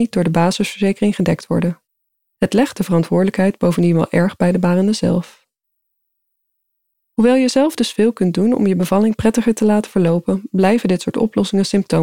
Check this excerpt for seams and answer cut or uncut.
uncut